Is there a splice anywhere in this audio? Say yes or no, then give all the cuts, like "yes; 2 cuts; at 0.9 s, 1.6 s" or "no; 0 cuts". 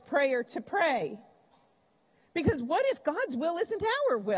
no; 0 cuts